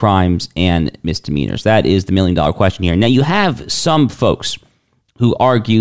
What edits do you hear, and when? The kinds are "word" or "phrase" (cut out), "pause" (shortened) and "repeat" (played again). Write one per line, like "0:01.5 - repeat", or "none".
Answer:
none